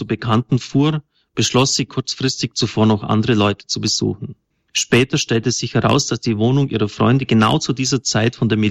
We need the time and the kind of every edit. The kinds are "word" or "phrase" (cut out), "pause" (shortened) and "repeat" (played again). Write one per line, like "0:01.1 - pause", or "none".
none